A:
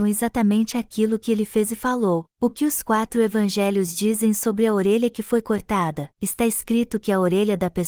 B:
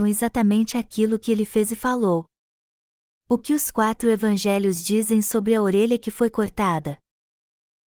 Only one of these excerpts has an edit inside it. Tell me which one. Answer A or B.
A